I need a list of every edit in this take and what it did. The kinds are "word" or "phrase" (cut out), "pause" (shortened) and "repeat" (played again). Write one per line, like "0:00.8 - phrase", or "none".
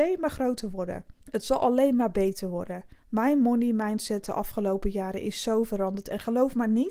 0:01.2 - pause
0:03.0 - pause